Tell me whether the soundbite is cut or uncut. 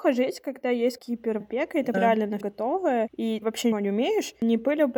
cut